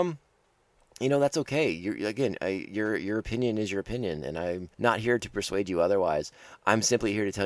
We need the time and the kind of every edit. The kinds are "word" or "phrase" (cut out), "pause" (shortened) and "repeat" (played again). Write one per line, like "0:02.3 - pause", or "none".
0:04.7 - pause